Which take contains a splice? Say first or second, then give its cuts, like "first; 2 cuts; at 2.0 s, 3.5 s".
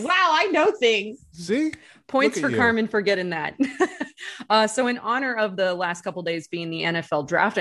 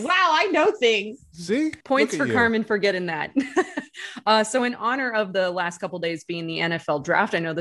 second; 1 cut; at 1.8 s